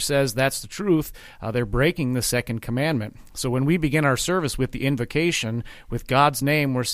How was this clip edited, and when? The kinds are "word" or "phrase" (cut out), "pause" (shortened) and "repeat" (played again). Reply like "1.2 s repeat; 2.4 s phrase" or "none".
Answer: none